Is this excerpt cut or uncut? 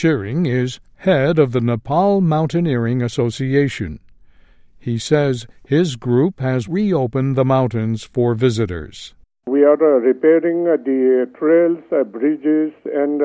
cut